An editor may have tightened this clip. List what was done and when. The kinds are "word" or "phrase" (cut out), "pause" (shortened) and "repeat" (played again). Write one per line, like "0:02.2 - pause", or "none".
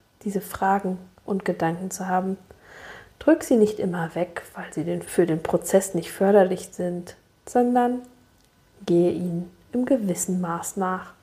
0:01.2 - word
0:05.0 - word
0:07.3 - pause